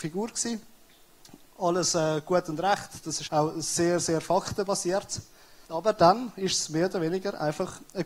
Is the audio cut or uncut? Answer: cut